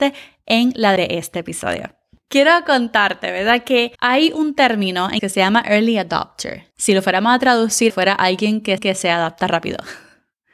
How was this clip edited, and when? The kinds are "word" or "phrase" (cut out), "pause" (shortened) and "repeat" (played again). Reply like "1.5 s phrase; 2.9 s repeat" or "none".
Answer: 1.0 s word; 3.9 s pause; 5.2 s word; 6.7 s pause; 7.9 s word; 8.8 s repeat